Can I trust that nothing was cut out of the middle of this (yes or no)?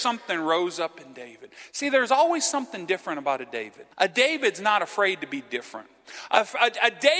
no